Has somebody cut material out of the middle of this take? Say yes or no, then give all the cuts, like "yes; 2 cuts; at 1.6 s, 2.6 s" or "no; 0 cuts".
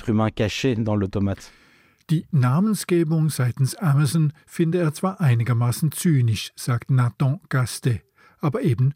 no; 0 cuts